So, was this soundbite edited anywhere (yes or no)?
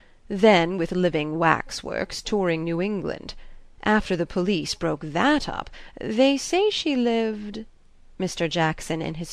no